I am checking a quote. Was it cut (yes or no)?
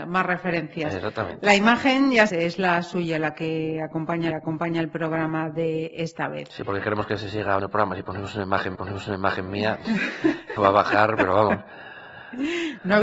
yes